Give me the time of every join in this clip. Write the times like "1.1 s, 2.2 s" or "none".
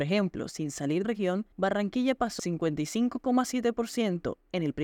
1.0 s, 1.5 s, 2.4 s